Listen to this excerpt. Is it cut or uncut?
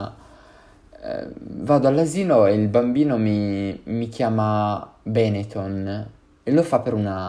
uncut